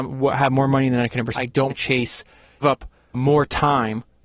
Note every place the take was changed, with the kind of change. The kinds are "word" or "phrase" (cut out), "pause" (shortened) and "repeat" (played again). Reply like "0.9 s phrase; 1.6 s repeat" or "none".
1.3 s word; 1.7 s word; 2.6 s word